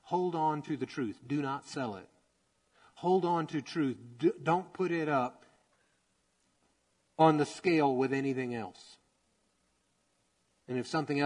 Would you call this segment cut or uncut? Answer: uncut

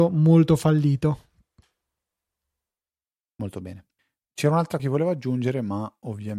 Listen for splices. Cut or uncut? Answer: cut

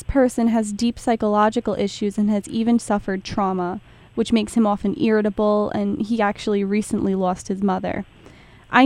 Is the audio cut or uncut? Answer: uncut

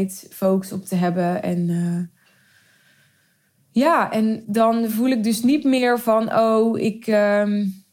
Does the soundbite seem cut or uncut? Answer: uncut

